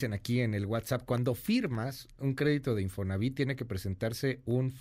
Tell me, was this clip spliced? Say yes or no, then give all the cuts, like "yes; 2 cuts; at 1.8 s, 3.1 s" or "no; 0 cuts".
no; 0 cuts